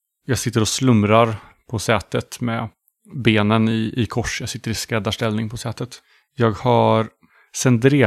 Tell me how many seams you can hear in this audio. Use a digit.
0